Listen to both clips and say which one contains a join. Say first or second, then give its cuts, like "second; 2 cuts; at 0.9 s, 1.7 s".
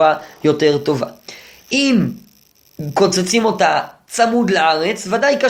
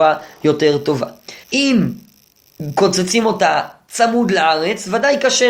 second; 1 cut; at 1.4 s